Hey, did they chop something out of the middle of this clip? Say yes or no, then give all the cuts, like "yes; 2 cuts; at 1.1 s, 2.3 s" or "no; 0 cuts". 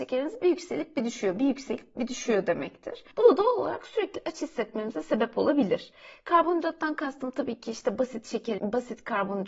yes; 2 cuts; at 3.1 s, 8.6 s